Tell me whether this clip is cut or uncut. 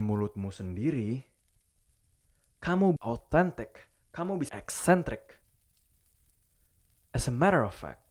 cut